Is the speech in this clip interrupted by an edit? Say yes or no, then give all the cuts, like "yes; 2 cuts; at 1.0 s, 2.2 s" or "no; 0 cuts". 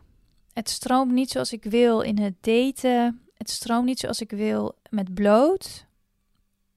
yes; 2 cuts; at 3.3 s, 4.8 s